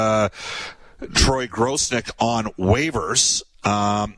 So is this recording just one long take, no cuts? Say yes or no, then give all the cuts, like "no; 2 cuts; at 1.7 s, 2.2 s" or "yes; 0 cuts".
yes; 0 cuts